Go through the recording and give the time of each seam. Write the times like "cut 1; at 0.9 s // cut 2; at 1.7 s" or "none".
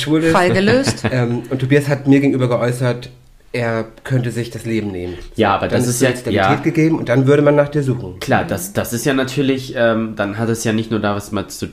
none